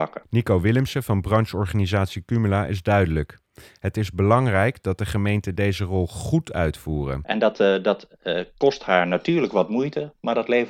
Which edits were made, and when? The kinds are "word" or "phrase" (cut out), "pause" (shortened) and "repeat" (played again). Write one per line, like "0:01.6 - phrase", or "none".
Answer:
none

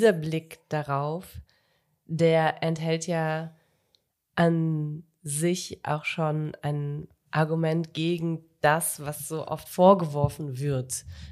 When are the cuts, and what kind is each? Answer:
none

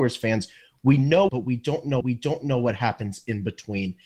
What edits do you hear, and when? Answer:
0:01.3 - phrase
0:02.0 - repeat

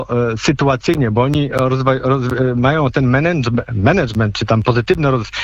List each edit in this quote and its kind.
none

